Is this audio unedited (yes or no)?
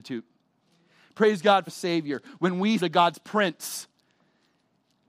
no